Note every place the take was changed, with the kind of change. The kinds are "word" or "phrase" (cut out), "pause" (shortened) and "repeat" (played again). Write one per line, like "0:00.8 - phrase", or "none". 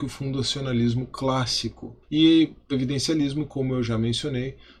0:02.0 - pause
0:02.7 - word

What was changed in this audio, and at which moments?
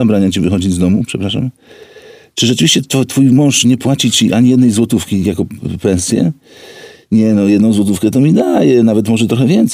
none

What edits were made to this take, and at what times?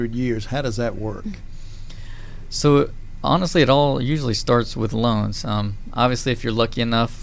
none

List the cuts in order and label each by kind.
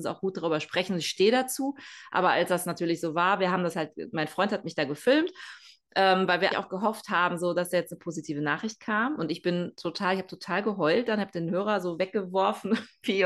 0:06.5 - word

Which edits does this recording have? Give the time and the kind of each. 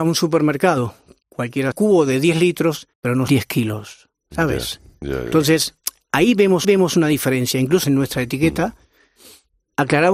0:01.7 - phrase
0:02.9 - pause
0:03.3 - word
0:06.6 - repeat
0:07.8 - word

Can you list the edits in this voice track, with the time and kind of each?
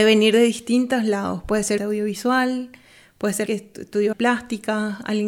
0:01.8 - phrase
0:03.5 - word
0:04.1 - word

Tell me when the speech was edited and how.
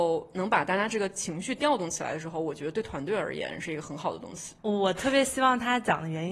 0:04.6 - pause

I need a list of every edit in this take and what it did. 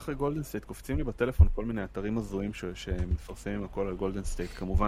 none

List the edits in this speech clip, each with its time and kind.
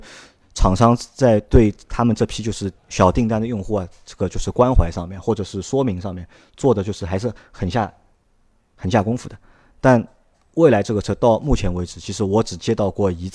0:02.8 - pause

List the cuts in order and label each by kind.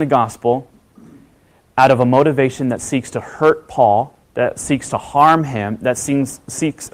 0:04.2 - pause

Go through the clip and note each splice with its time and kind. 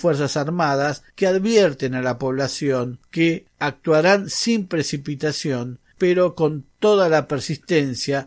0:01.1 - pause

